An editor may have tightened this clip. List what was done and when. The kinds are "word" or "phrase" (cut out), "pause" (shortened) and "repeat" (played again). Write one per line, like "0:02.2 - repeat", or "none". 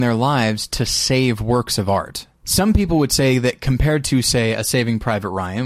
0:02.4 - pause